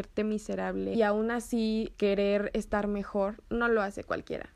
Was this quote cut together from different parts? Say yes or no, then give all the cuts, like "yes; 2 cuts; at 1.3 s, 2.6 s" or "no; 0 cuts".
yes; 2 cuts; at 0.9 s, 1.9 s